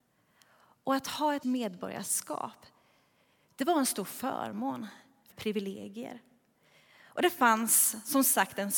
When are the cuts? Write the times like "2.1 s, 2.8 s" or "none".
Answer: 1.4 s, 5.3 s